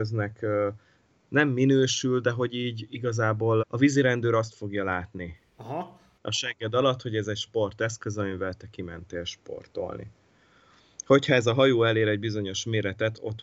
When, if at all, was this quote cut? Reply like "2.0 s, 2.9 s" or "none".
3.6 s